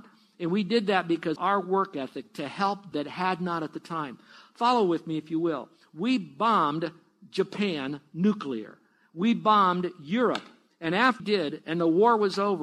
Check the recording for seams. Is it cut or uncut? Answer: cut